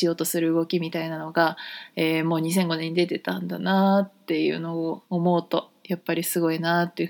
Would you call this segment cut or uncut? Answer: cut